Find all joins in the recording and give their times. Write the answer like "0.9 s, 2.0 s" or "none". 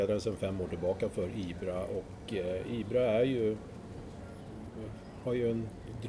none